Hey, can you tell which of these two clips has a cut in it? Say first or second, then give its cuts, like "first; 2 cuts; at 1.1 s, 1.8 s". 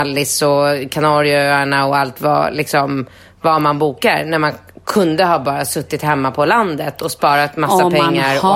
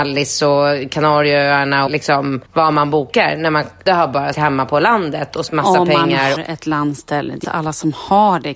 second; 7 cuts; at 1.9 s, 2.5 s, 3.9 s, 4.3 s, 5.5 s, 6.4 s, 7.4 s